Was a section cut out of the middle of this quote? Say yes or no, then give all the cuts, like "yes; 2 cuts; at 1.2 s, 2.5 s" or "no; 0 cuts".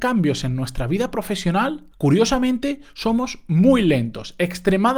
yes; 1 cut; at 1.9 s